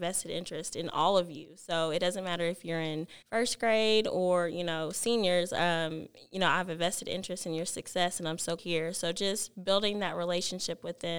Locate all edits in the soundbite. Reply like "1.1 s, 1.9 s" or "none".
3.2 s, 8.6 s